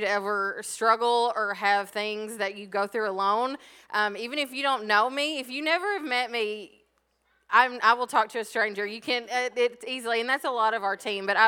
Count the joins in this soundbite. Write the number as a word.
zero